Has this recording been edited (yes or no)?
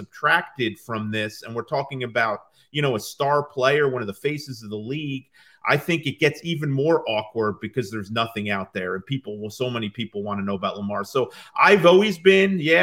no